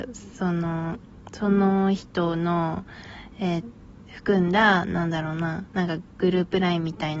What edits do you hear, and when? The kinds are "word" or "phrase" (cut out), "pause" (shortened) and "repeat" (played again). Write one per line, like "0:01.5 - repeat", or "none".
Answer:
0:03.6 - word